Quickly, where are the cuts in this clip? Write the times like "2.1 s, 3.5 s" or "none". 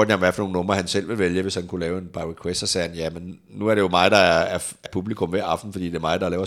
4.9 s